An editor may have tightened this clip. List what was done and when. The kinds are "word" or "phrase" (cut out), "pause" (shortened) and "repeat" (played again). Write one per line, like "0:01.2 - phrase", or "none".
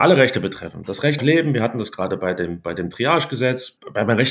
0:01.2 - word